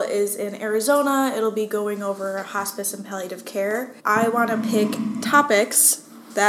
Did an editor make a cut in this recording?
yes; 1 cut; at 4.0 s

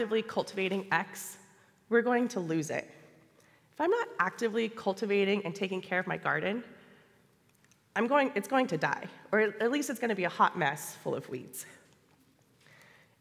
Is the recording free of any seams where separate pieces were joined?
yes; 0 cuts

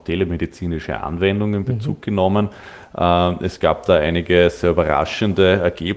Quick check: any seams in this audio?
no; 0 cuts

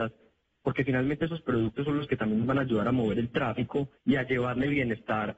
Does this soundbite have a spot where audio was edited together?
yes; 1 cut; at 4.0 s

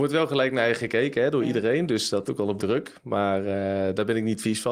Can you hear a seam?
yes; 2 cuts; at 2.3 s, 2.6 s

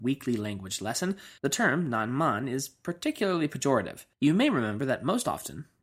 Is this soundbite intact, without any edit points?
no; 2 cuts; at 1.4 s, 4.1 s

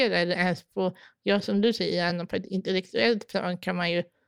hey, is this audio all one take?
yes; 0 cuts

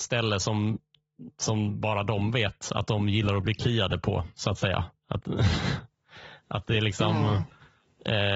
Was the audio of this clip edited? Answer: yes; 1 cut; at 5.0 s

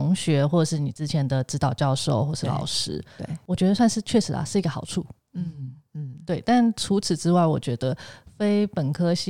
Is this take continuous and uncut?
yes; 0 cuts

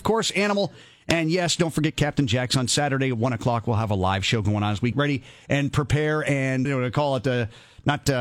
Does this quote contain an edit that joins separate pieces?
yes; 2 cuts; at 4.9 s, 6.6 s

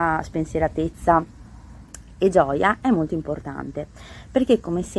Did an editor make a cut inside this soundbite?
no; 0 cuts

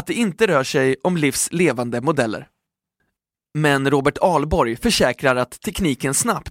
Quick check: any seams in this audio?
no; 0 cuts

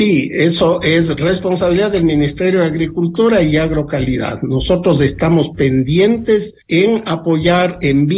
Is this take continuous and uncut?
no; 1 cut; at 6.6 s

